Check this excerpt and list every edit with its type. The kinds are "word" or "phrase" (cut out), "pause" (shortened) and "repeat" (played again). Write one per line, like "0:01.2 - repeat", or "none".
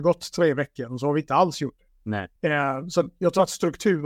0:02.4 - pause

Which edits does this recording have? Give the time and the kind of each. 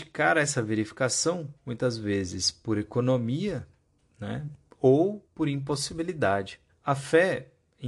0:01.6 - pause
0:04.0 - pause
0:05.3 - pause
0:06.7 - pause

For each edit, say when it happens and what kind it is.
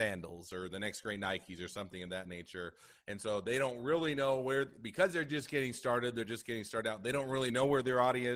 none

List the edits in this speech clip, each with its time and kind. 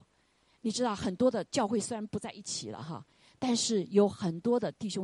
none

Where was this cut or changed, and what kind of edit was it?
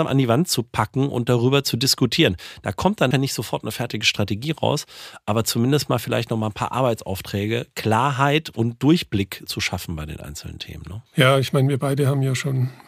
0:03.1 - word
0:09.5 - word
0:11.1 - pause

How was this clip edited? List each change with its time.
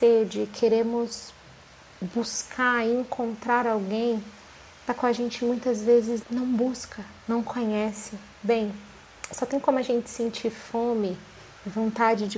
0:06.2 - word
0:07.2 - pause
0:08.3 - pause

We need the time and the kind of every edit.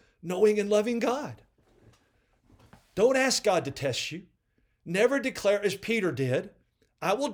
none

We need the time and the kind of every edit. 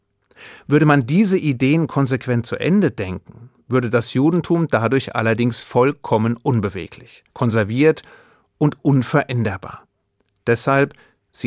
0:07.3 - pause

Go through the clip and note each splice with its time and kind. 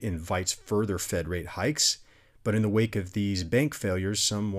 none

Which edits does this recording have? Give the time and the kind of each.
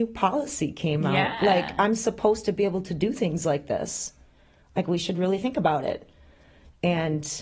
none

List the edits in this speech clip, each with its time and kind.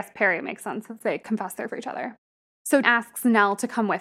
0:01.7 - word
0:02.8 - word

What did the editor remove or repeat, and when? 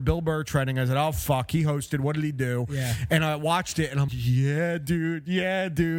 0:04.1 - word

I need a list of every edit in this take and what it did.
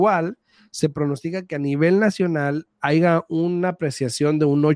none

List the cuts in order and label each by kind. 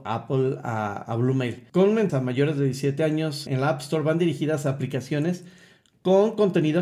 0:02.1 - phrase
0:03.5 - word

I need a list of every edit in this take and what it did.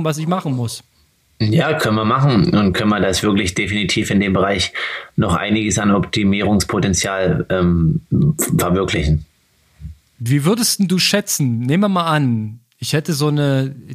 none

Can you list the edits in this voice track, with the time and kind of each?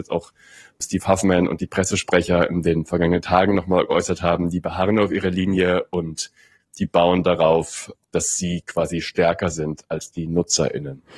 none

